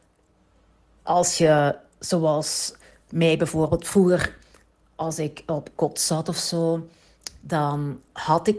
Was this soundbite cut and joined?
no; 0 cuts

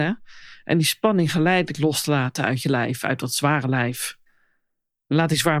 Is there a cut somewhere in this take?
no; 0 cuts

